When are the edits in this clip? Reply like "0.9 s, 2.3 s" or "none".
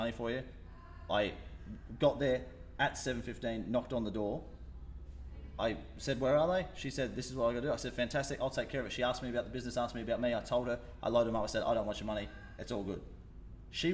none